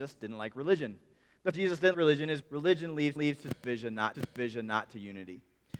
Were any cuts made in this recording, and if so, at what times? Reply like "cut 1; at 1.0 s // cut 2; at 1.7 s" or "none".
cut 1; at 1.5 s // cut 2; at 1.9 s // cut 3; at 2.4 s // cut 4; at 3.2 s // cut 5; at 4.1 s